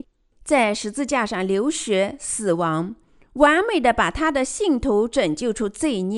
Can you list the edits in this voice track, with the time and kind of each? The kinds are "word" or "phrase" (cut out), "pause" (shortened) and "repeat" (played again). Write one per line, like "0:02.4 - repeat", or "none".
none

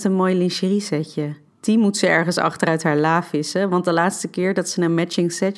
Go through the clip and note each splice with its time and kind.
0:01.5 - pause

